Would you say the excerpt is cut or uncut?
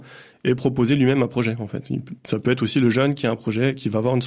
uncut